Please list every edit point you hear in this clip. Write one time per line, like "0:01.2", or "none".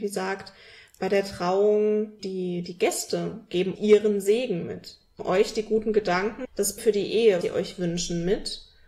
0:02.2
0:03.8
0:05.2
0:06.4
0:06.8
0:07.4